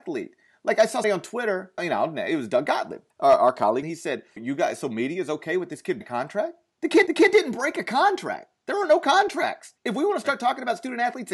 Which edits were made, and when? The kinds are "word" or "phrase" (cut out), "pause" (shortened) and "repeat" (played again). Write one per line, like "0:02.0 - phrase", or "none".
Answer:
0:01.0 - word
0:01.8 - word
0:03.1 - pause
0:03.8 - phrase
0:04.4 - word
0:06.0 - word
0:07.1 - repeat
0:09.8 - pause